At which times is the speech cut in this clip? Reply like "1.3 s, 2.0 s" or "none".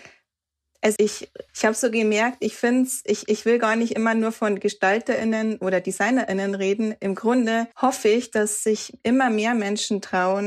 1.0 s, 1.5 s, 7.7 s